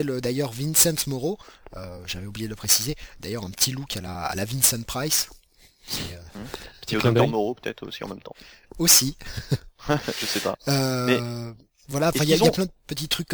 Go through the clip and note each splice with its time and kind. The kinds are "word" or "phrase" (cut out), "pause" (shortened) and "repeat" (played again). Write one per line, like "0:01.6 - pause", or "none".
none